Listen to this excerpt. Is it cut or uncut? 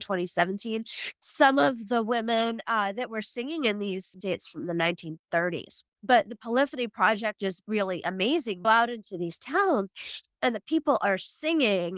cut